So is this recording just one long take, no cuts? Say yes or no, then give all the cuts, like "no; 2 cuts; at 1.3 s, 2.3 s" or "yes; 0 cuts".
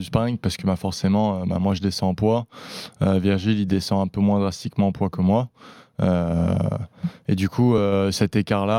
yes; 0 cuts